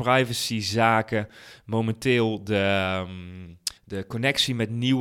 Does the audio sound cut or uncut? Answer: cut